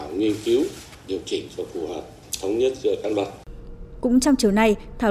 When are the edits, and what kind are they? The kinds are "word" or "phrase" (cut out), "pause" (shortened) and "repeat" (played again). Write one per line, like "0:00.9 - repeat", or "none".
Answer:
none